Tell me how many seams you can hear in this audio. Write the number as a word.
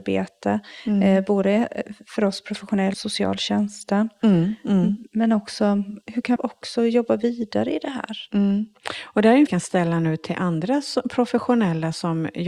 three